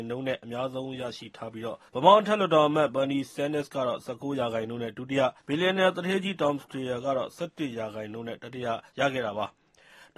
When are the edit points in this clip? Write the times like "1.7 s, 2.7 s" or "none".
1.9 s, 5.4 s, 8.9 s